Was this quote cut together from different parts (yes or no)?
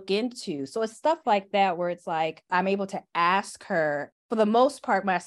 no